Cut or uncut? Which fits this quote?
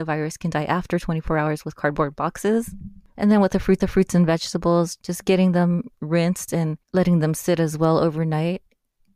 cut